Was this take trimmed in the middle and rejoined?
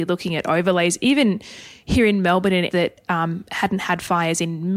yes; 1 cut; at 2.7 s

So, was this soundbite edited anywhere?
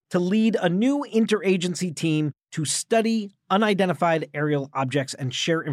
no; 0 cuts

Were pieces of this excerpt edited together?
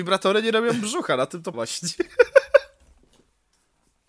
yes; 1 cut; at 1.5 s

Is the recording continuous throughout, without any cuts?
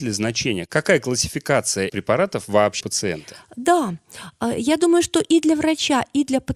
no; 2 cuts; at 1.9 s, 2.8 s

